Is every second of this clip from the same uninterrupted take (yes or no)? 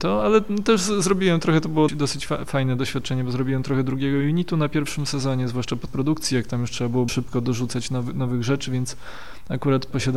no